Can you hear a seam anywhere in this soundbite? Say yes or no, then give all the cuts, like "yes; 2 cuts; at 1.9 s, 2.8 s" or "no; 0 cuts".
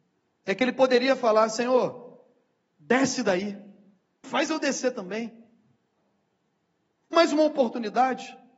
yes; 2 cuts; at 4.2 s, 7.1 s